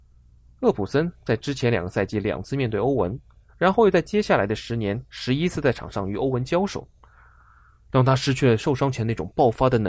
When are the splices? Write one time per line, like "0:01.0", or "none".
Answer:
none

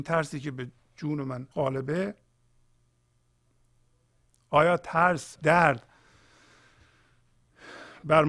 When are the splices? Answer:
0:01.5
0:05.4

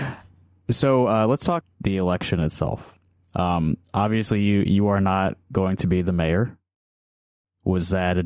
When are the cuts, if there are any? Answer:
0:01.6

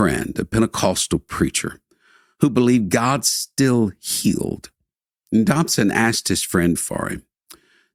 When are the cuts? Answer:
0:06.8

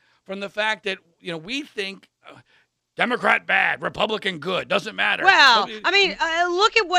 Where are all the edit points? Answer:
none

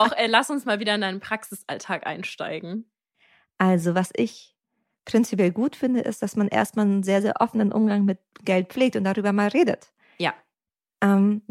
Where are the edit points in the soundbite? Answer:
none

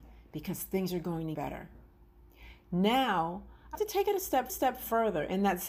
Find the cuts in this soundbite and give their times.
0:01.3
0:03.7
0:04.5

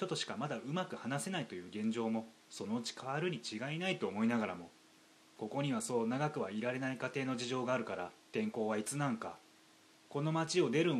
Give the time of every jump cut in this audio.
0:08.2

